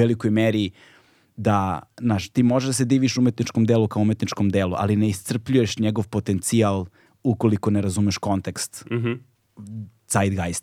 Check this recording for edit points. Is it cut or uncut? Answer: uncut